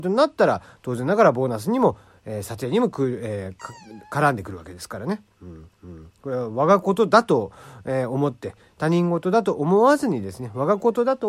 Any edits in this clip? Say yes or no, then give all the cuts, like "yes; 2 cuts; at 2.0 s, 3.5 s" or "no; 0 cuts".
yes; 1 cut; at 5.7 s